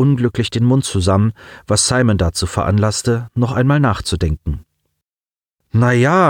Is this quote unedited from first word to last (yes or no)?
yes